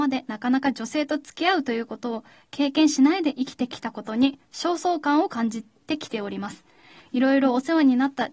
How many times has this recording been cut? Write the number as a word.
zero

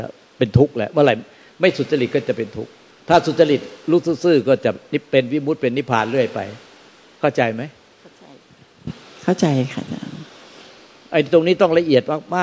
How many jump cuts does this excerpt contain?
zero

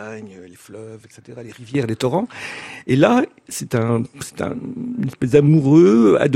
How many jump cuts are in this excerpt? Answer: zero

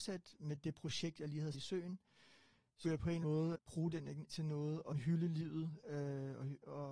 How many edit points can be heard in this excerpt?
six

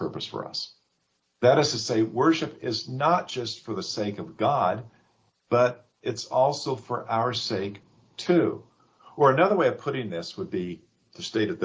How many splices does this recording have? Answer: zero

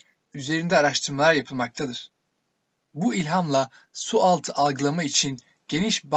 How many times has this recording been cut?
zero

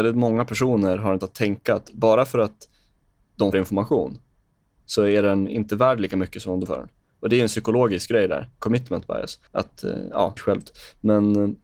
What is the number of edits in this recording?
five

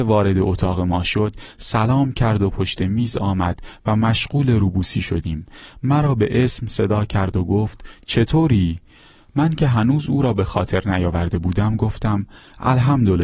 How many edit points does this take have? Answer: zero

